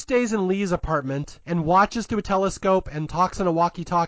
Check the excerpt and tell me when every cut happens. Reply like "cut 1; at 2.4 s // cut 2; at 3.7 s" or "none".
cut 1; at 1.4 s